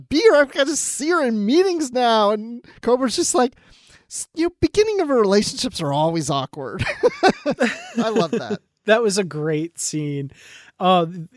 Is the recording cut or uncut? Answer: uncut